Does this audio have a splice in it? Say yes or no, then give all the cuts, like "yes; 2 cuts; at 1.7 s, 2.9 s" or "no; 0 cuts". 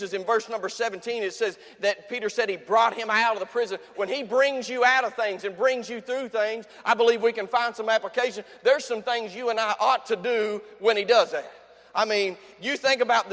no; 0 cuts